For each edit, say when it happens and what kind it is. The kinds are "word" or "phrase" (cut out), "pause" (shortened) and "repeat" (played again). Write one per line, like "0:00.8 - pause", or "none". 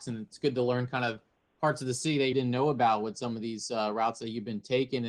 0:02.3 - word

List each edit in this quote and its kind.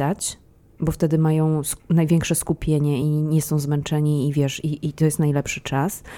none

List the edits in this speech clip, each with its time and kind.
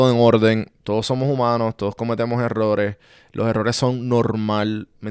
none

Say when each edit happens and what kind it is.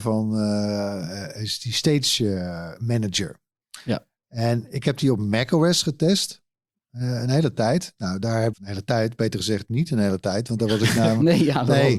0:08.5 - word

